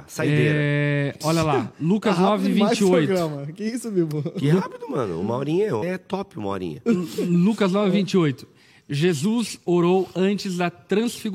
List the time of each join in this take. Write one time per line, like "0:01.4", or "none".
0:05.8